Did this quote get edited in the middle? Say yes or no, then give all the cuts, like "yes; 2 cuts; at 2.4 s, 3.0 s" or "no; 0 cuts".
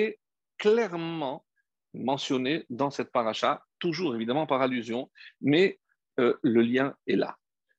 no; 0 cuts